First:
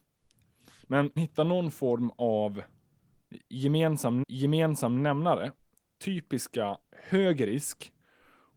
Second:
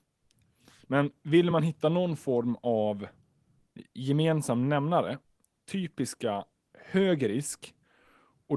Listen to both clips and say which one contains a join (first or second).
first